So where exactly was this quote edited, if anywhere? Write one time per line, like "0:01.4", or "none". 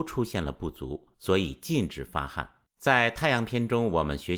0:01.1
0:02.7